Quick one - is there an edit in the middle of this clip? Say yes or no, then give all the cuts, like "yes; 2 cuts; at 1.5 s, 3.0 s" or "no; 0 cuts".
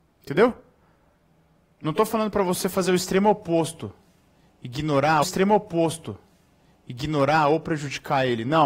yes; 1 cut; at 5.2 s